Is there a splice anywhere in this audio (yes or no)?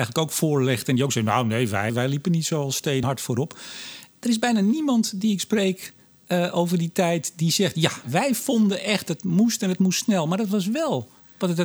yes